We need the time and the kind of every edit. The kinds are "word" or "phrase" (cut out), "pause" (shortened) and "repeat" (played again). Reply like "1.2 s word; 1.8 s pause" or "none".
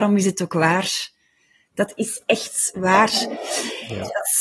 none